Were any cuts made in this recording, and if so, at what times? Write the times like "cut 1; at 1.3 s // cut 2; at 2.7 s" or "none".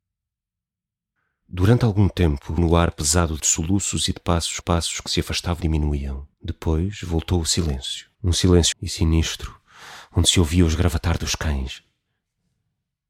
cut 1; at 2.6 s // cut 2; at 3.4 s // cut 3; at 4.6 s // cut 4; at 5.6 s // cut 5; at 6.3 s // cut 6; at 8.1 s // cut 7; at 8.7 s